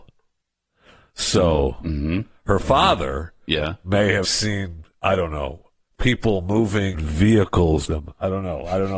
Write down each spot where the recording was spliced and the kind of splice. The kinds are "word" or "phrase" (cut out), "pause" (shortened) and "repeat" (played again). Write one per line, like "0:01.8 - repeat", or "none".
0:04.2 - word
0:05.8 - pause
0:06.9 - word
0:07.8 - phrase